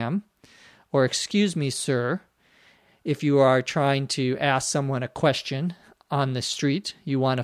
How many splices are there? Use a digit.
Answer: 0